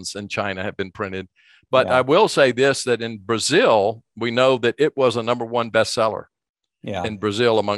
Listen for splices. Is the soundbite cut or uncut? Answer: uncut